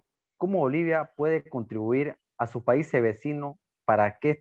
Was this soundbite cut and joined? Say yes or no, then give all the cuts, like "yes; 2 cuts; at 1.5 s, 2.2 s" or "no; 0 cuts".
no; 0 cuts